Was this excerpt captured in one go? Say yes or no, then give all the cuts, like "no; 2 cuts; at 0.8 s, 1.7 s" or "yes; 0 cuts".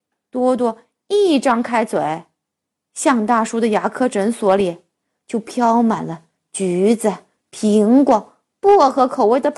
yes; 0 cuts